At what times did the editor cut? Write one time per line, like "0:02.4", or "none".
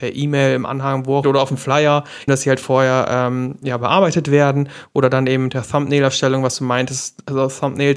0:01.2
0:02.3

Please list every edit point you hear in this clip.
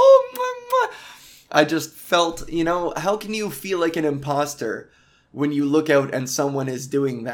none

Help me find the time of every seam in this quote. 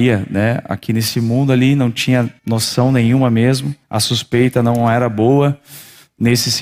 0:02.4
0:03.8

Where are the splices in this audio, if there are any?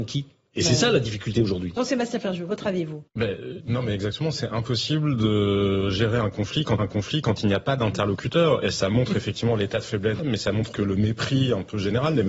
0:03.1
0:06.8
0:10.2
0:10.7

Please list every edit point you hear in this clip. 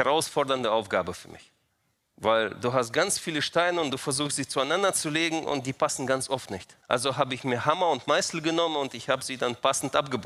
0:01.7
0:06.8

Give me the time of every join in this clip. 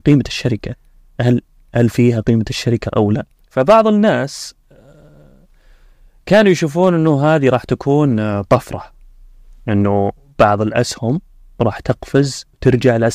0:03.4

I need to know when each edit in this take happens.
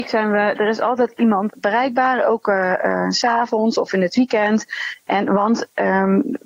0:01.5

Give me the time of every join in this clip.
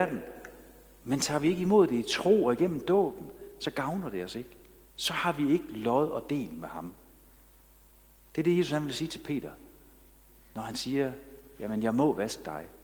none

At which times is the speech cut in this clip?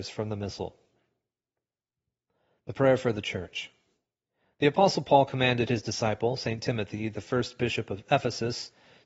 none

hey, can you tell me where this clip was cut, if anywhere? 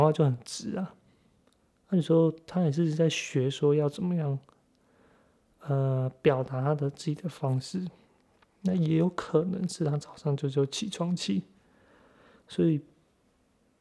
none

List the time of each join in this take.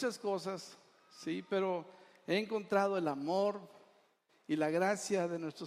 none

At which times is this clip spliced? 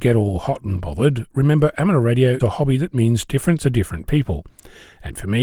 0:02.4
0:03.6

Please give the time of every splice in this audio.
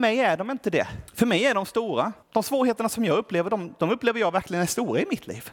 0:01.1
0:02.2

